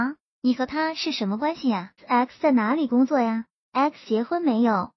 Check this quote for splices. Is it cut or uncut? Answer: cut